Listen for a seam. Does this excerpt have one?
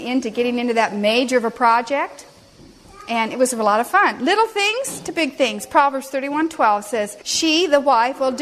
yes; 1 cut; at 7.2 s

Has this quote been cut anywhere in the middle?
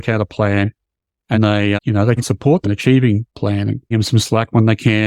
yes; 6 cuts; at 1.3 s, 1.8 s, 2.2 s, 2.6 s, 3.3 s, 3.9 s

